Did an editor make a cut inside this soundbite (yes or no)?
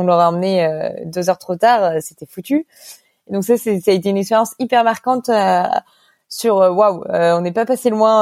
no